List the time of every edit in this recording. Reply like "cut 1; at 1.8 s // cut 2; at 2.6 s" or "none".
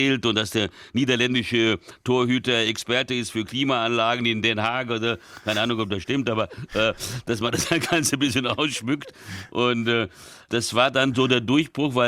none

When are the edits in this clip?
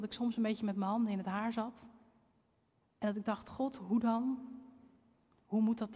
none

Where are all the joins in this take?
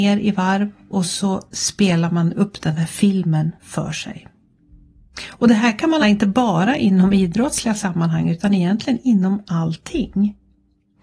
cut 1; at 3.6 s // cut 2; at 6.0 s

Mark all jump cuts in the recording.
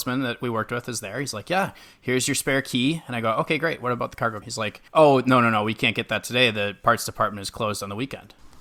cut 1; at 4.4 s // cut 2; at 4.9 s

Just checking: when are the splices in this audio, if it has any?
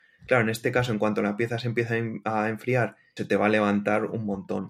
cut 1; at 3.2 s

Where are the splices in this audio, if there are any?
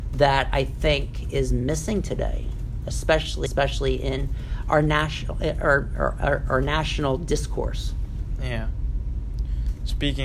cut 1; at 3.5 s

